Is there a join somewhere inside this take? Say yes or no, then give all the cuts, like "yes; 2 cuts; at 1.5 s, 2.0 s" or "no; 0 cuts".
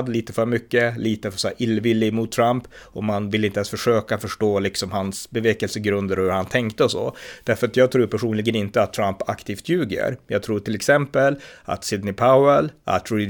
no; 0 cuts